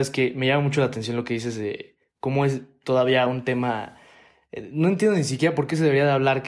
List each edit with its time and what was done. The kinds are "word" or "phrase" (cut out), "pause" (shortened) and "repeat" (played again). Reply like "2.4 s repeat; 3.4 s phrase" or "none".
none